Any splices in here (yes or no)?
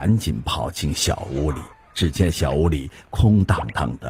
yes